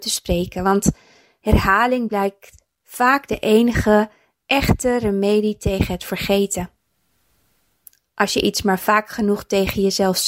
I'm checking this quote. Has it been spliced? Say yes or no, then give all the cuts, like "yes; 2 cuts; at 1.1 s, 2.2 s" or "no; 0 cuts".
no; 0 cuts